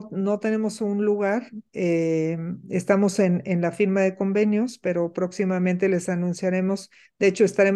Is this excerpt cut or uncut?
uncut